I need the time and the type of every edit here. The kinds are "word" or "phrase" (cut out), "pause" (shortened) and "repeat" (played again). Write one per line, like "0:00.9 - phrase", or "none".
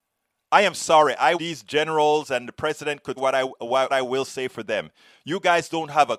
0:01.4 - word
0:03.2 - word
0:03.9 - word